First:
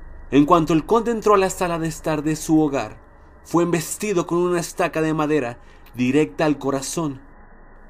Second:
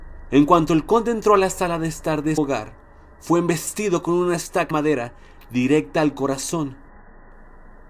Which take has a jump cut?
second; 2 cuts; at 2.4 s, 4.7 s

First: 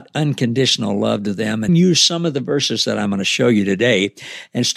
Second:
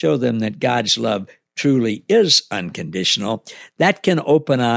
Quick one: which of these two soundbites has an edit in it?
first; 1 cut; at 1.7 s

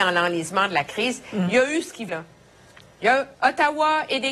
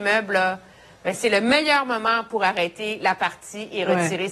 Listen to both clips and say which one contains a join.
first; 2 cuts; at 2.1 s, 3.3 s

